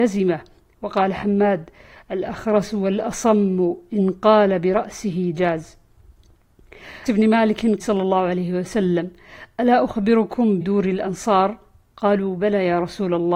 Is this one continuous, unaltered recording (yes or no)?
no